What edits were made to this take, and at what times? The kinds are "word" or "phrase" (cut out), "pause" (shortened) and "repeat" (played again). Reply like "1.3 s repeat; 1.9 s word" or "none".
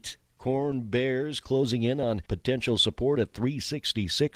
2.3 s pause

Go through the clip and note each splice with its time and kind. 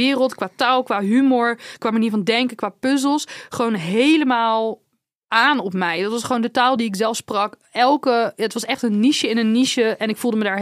none

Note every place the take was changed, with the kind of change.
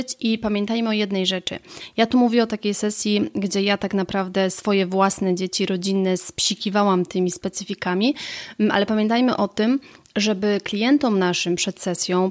none

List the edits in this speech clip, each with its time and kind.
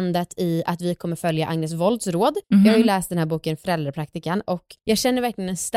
2.4 s pause; 4.8 s pause

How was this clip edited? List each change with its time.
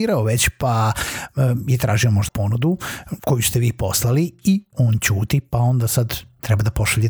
2.3 s word; 4.7 s word

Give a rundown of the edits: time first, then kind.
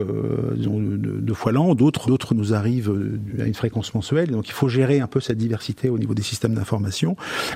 2.0 s word

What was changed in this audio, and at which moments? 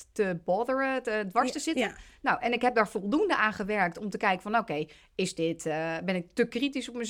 none

